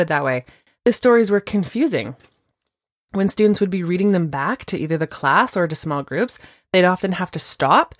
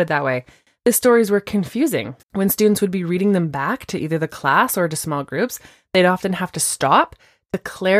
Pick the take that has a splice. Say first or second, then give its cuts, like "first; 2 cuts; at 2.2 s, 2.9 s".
second; 1 cut; at 2.2 s